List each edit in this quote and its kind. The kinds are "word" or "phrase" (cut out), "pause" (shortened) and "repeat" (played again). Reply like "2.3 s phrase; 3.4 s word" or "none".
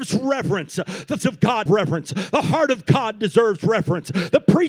1.2 s word; 1.7 s word

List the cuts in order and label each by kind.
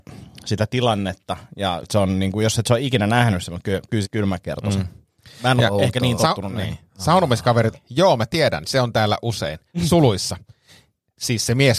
1.8 s word; 4.0 s word; 6.2 s word; 7.7 s word; 8.6 s word

